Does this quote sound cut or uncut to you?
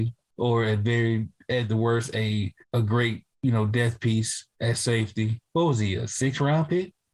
cut